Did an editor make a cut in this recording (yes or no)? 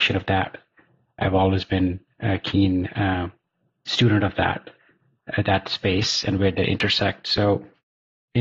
no